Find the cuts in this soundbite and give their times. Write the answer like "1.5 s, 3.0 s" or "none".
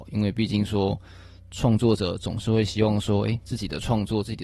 none